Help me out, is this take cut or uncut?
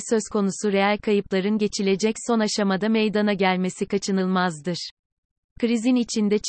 uncut